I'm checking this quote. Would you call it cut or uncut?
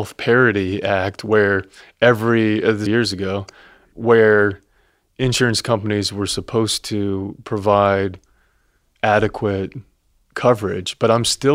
cut